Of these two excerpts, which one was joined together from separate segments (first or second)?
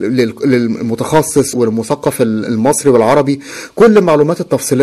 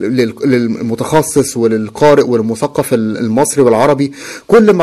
first